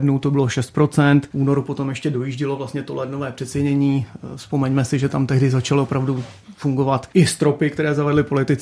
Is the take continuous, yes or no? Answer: yes